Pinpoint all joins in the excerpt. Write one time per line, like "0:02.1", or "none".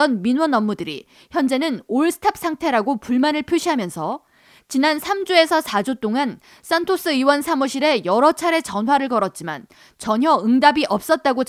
none

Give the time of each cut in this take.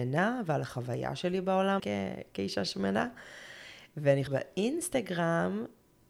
0:01.8
0:04.3

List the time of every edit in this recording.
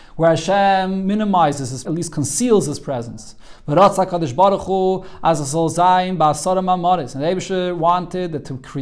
0:01.8

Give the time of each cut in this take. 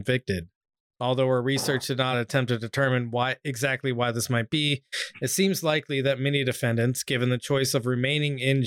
none

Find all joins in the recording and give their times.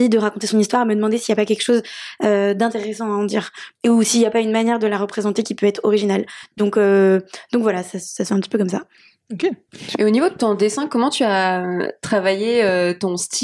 none

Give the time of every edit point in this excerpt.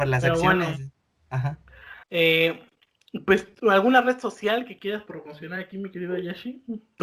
0:02.0

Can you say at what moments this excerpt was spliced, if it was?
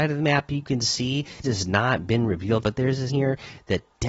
0:01.4
0:02.6
0:03.1

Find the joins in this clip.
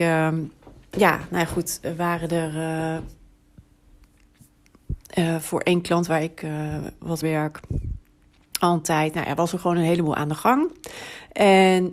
0:07.2

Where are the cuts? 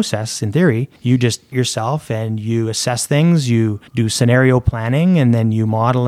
0:01.0
0:01.5
0:03.9

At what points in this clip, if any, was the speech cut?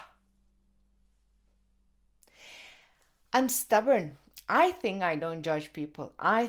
none

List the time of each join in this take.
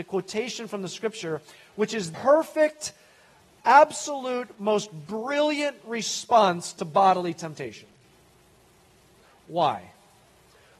0:02.1

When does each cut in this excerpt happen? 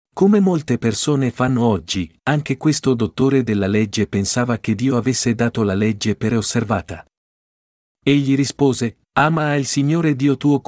0:06.3

